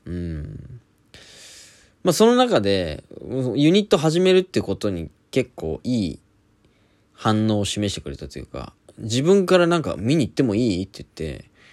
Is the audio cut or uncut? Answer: uncut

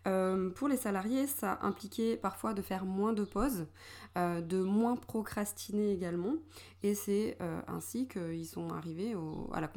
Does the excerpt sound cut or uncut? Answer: uncut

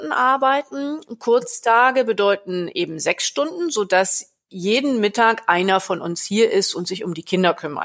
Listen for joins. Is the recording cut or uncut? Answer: uncut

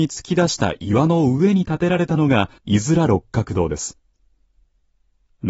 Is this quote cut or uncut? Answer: cut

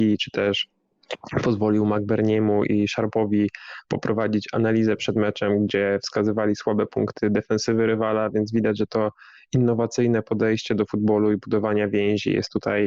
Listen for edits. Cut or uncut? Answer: uncut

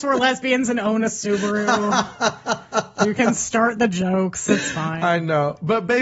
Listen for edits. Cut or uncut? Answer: uncut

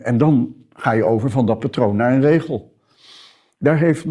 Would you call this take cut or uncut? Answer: uncut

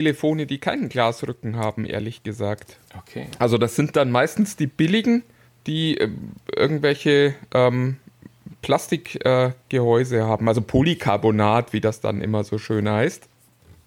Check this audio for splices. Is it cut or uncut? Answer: cut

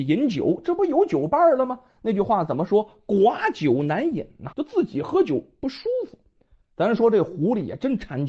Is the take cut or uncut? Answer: cut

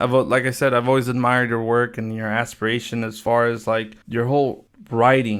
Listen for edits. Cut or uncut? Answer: cut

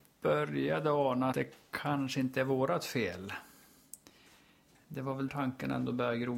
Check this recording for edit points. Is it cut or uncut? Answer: cut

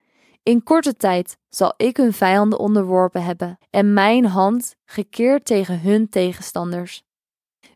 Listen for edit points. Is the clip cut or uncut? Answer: cut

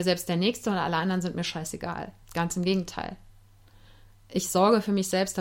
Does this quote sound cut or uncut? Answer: cut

